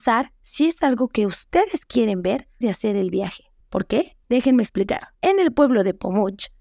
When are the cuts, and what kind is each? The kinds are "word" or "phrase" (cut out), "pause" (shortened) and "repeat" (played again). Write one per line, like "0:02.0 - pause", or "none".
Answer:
0:02.6 - word
0:03.6 - pause
0:04.2 - pause
0:05.1 - pause